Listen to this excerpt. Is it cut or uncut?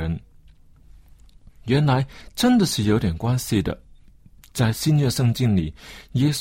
uncut